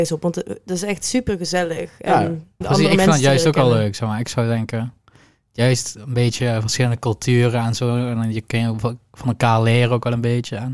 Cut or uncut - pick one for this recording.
cut